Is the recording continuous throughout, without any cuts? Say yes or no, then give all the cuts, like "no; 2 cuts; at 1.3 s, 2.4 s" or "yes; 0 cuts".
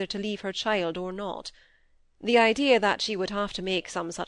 yes; 0 cuts